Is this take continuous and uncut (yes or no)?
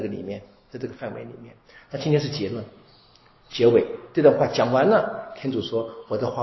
yes